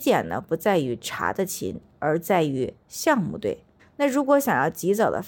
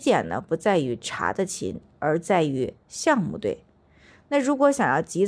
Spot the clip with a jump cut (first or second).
first